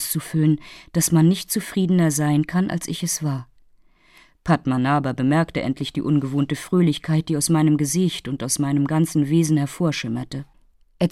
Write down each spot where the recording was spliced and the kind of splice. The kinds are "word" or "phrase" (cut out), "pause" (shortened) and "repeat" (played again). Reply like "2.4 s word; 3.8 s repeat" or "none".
none